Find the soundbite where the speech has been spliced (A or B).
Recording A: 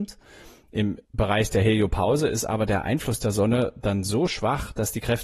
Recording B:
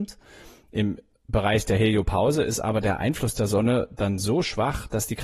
A